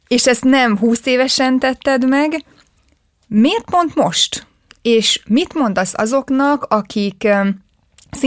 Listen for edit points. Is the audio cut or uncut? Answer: uncut